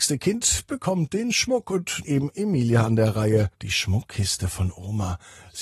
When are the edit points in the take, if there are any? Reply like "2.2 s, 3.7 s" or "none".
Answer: 2.0 s, 3.5 s